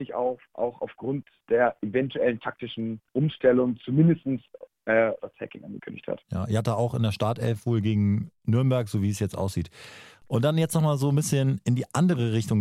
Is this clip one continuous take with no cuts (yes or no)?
no